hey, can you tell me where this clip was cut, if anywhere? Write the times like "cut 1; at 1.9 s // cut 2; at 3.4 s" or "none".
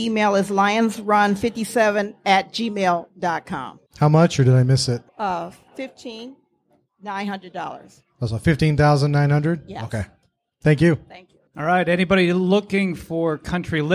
cut 1; at 3.9 s // cut 2; at 5.1 s // cut 3; at 10.2 s // cut 4; at 11.5 s